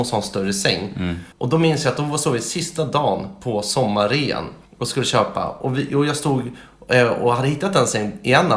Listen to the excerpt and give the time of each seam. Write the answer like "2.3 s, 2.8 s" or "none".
1.3 s, 4.6 s